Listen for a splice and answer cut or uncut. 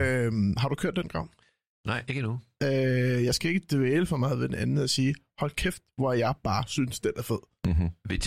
uncut